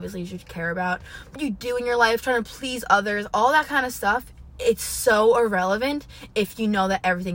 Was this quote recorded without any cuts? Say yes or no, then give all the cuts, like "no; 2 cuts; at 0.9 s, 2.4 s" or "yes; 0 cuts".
no; 1 cut; at 1.3 s